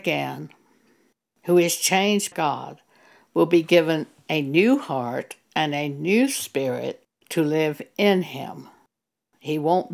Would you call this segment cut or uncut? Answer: cut